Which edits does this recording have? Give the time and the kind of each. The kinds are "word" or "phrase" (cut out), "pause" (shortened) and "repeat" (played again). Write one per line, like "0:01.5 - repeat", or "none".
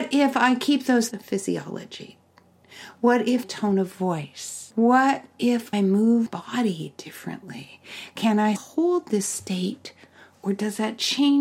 0:01.1 - phrase
0:03.4 - phrase
0:04.7 - pause
0:05.7 - word
0:06.3 - word
0:08.6 - word